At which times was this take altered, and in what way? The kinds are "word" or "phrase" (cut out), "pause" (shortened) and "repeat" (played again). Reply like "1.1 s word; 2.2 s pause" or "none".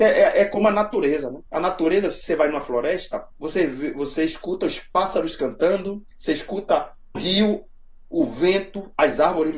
1.5 s pause; 3.3 s pause; 6.1 s pause; 7.1 s word